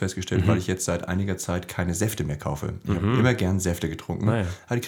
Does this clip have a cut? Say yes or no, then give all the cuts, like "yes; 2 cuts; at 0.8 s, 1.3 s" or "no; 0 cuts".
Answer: no; 0 cuts